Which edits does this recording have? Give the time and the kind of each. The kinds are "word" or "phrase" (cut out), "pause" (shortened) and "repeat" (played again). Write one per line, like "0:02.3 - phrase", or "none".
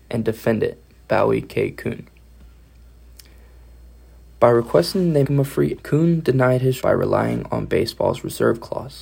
0:05.2 - word
0:05.8 - word
0:06.8 - word